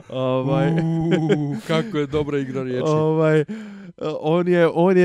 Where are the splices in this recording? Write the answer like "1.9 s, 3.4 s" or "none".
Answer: none